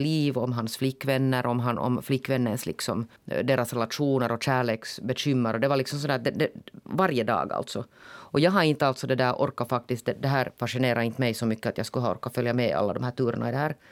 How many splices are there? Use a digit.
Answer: 1